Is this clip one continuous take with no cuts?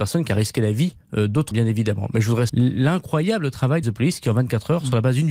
no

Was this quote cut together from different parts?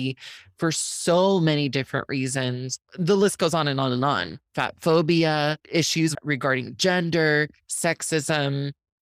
yes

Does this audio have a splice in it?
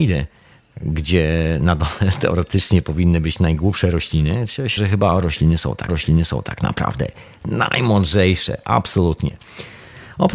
yes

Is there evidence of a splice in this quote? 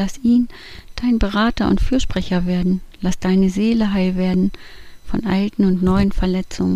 no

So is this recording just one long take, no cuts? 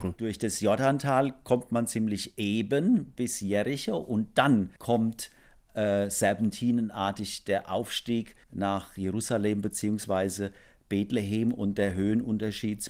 no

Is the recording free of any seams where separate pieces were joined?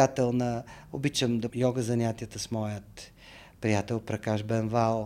no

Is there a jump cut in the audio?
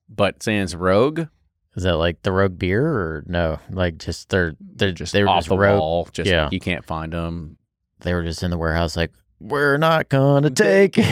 no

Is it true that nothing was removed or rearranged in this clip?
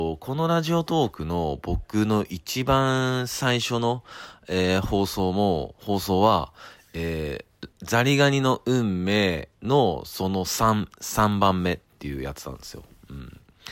no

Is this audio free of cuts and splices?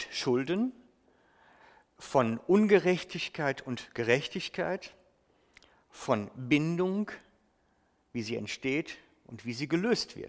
yes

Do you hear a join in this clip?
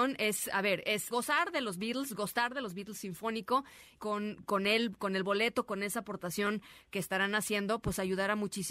yes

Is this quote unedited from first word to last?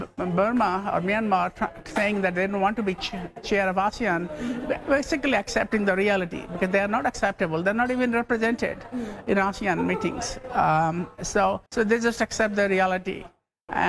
no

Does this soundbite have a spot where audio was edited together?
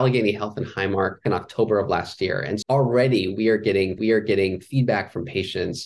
yes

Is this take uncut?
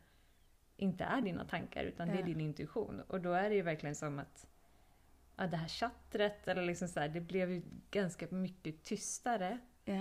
yes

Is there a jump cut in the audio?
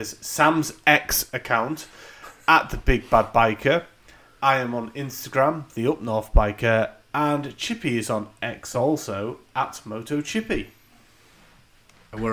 no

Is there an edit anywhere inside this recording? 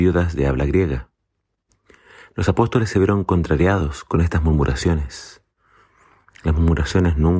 no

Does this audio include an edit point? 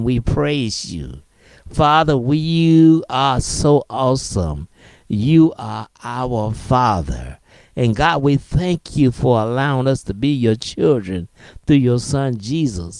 no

